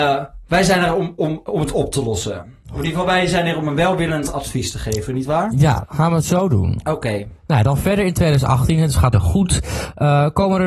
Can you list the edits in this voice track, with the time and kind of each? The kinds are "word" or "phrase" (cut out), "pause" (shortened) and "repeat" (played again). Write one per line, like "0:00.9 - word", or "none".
0:07.4 - pause
0:09.1 - phrase